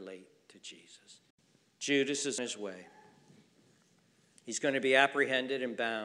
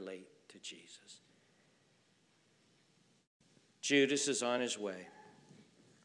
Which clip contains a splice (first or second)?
first